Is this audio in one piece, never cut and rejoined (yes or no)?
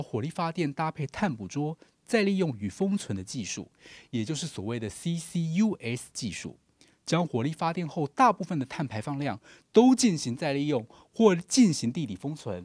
yes